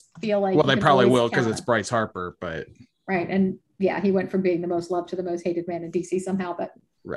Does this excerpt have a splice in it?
no; 0 cuts

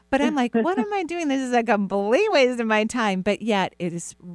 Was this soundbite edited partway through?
no; 0 cuts

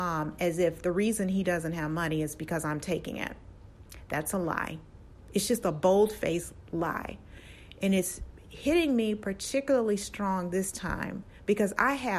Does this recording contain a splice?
no; 0 cuts

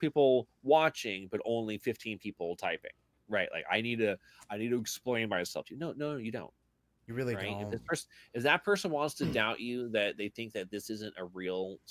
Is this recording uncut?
yes; 0 cuts

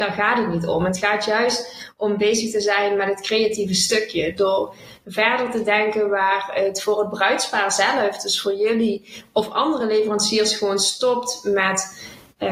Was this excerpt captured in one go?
yes; 0 cuts

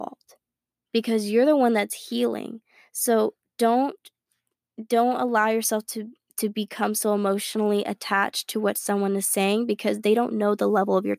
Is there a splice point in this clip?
no; 0 cuts

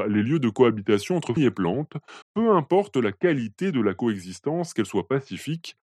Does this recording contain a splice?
yes; 2 cuts; at 1.4 s, 2.2 s

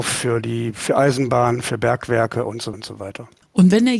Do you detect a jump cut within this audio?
yes; 1 cut; at 2.7 s

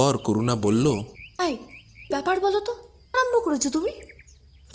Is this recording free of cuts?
no; 2 cuts; at 2.1 s, 3.1 s

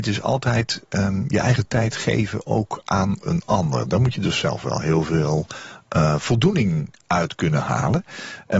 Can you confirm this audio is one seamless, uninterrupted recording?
yes; 0 cuts

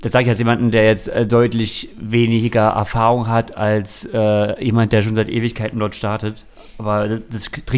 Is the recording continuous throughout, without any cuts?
yes; 0 cuts

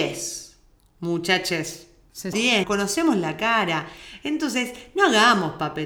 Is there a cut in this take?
yes; 2 cuts; at 2.3 s, 2.6 s

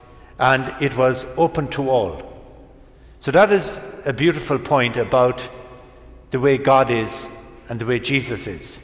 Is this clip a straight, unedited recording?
yes; 0 cuts

